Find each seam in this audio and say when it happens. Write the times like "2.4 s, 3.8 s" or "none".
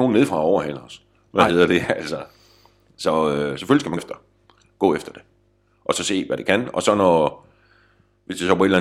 4.0 s

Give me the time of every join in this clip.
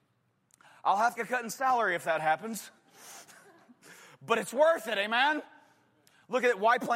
1.2 s

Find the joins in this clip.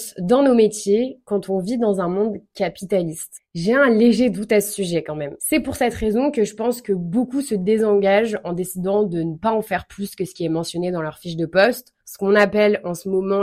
5.4 s, 12.0 s

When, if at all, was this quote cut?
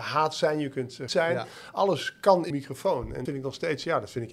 1.1 s, 2.5 s, 3.3 s

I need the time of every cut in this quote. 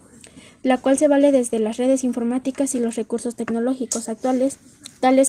none

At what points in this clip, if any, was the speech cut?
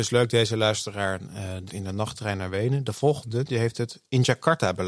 1.7 s

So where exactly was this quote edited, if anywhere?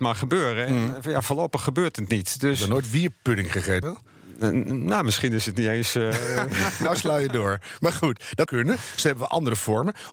3.8 s, 8.5 s

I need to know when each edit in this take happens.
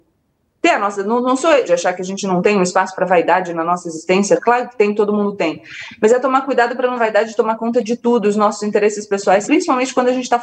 1.6 s, 7.0 s, 9.5 s

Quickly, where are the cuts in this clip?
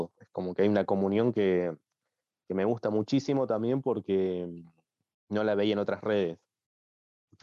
none

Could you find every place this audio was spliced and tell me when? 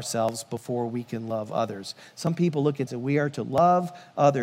2.9 s

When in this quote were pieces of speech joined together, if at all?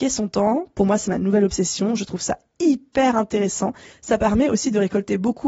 none

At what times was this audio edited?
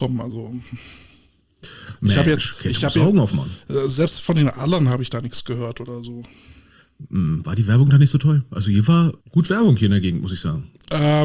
9.2 s

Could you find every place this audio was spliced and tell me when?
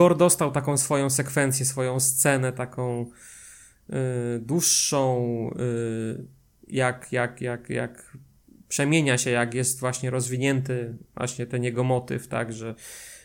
none

